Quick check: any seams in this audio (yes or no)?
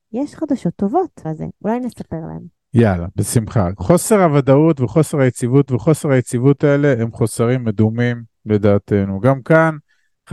yes